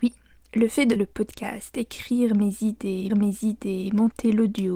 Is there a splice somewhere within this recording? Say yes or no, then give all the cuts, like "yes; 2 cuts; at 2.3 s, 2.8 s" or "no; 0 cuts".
yes; 2 cuts; at 1.0 s, 3.1 s